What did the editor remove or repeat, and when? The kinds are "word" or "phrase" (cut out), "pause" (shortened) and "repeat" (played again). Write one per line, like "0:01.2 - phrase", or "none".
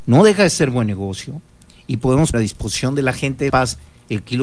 0:02.3 - word
0:03.5 - word